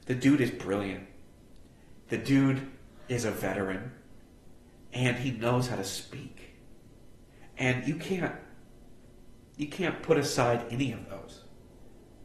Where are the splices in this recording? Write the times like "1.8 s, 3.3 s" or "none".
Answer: none

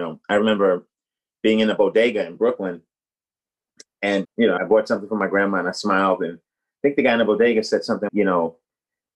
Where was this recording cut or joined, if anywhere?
4.2 s, 4.6 s, 8.1 s

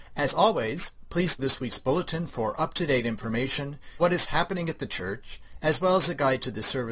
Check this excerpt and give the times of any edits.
1.4 s, 4.0 s

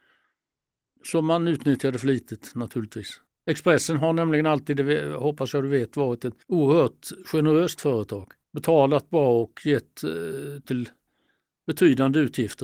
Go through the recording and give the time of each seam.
3.3 s, 6.4 s, 8.4 s, 10.6 s

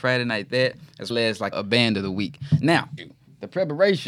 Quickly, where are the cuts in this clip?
1.1 s, 1.5 s, 3.0 s

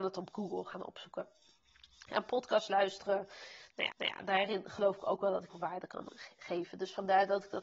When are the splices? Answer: 3.9 s, 5.5 s

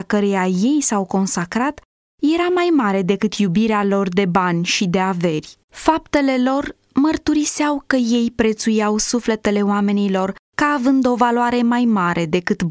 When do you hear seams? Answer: 5.6 s, 10.4 s

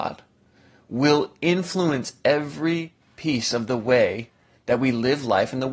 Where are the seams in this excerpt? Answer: none

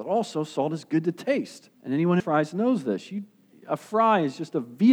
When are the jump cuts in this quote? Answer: 1.7 s, 2.2 s

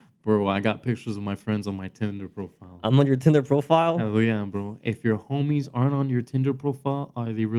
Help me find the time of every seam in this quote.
none

